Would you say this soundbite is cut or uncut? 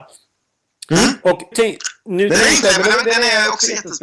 cut